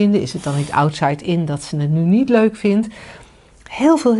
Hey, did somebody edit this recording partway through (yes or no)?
no